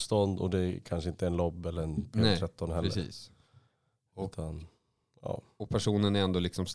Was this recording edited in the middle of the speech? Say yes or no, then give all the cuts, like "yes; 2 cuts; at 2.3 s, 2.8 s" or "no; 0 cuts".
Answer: no; 0 cuts